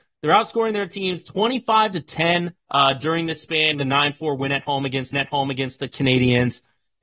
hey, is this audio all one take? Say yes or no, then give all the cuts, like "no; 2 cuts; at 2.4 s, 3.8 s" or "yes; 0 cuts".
no; 3 cuts; at 2.6 s, 3.7 s, 5.1 s